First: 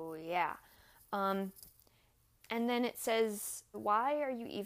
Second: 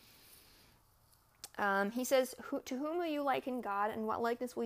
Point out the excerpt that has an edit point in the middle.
first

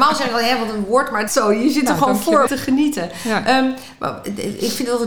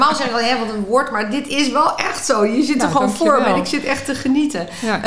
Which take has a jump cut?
first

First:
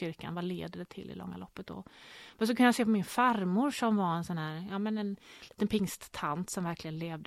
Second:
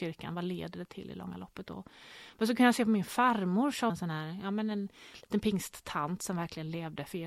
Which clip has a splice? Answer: second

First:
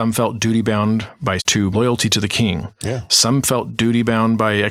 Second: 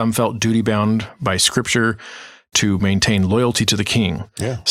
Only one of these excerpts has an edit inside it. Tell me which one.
first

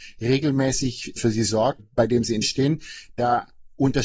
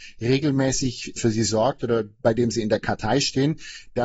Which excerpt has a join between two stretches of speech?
first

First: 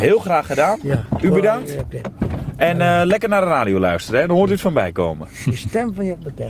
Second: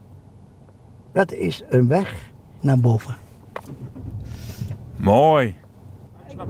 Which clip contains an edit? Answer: second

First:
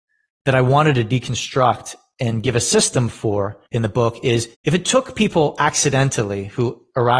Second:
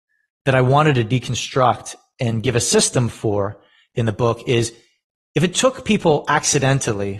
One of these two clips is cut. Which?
first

